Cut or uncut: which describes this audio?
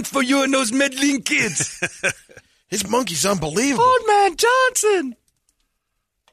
uncut